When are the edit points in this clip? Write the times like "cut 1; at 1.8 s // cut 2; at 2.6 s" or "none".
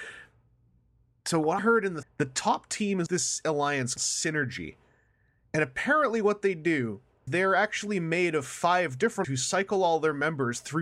cut 1; at 1.6 s // cut 2; at 2.0 s // cut 3; at 3.1 s // cut 4; at 4.0 s // cut 5; at 7.3 s // cut 6; at 9.2 s